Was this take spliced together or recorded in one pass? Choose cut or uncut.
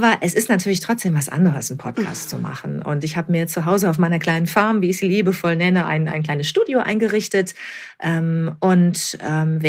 uncut